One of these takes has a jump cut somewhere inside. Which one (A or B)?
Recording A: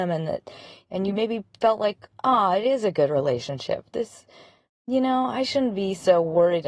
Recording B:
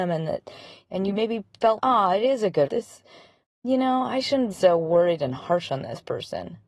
B